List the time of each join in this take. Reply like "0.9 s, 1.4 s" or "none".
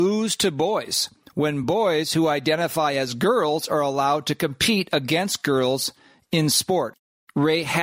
none